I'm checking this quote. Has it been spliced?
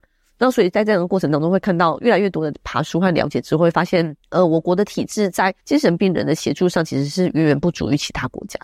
yes; 2 cuts; at 4.2 s, 5.6 s

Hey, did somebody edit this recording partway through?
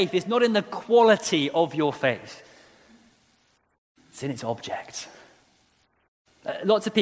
no; 0 cuts

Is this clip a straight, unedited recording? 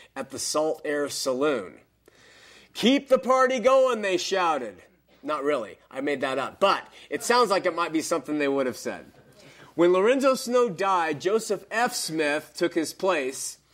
yes; 0 cuts

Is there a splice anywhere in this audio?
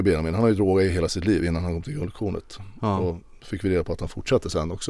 no; 0 cuts

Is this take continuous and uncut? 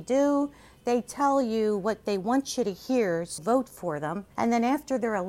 no; 2 cuts; at 3.4 s, 4.3 s

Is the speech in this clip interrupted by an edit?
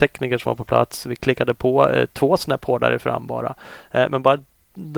no; 0 cuts

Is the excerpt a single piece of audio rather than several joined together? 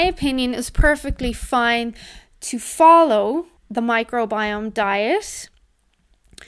no; 1 cut; at 3.6 s

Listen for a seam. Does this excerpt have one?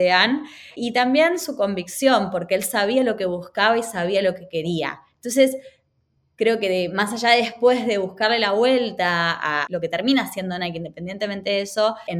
no; 0 cuts

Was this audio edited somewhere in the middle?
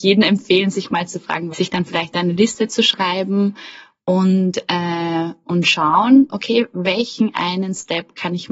yes; 1 cut; at 1.5 s

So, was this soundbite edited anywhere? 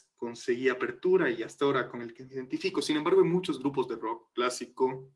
no; 0 cuts

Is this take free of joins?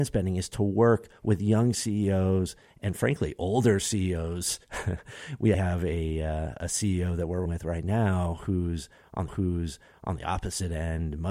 no; 3 cuts; at 5.5 s, 7.5 s, 9.3 s

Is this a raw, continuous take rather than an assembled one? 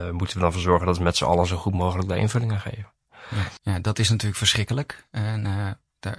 no; 1 cut; at 3.6 s

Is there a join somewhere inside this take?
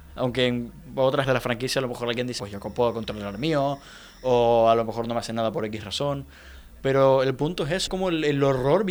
yes; 3 cuts; at 1.2 s, 2.4 s, 7.9 s

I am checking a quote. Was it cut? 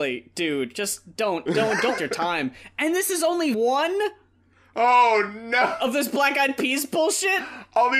yes; 3 cuts; at 1.5 s, 2.0 s, 3.5 s

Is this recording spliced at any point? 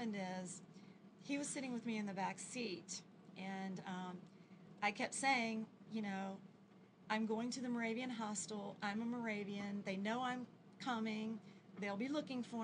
no; 0 cuts

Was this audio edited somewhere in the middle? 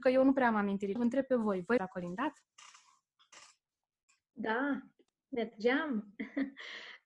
yes; 2 cuts; at 1.0 s, 1.8 s

